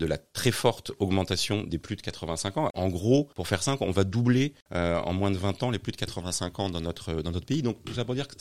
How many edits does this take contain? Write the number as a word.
two